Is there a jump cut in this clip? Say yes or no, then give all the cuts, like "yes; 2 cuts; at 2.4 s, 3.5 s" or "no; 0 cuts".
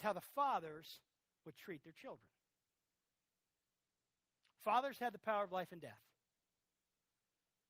no; 0 cuts